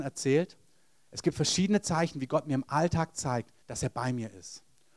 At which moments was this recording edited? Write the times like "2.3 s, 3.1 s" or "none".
3.6 s

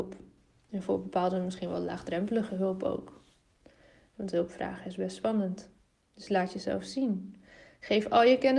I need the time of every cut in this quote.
none

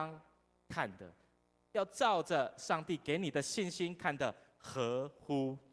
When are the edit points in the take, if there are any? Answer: none

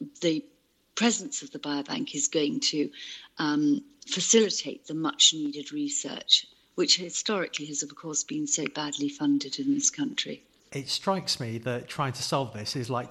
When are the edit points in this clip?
none

